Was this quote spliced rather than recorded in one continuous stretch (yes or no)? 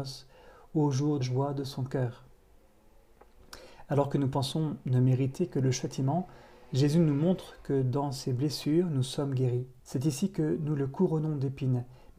yes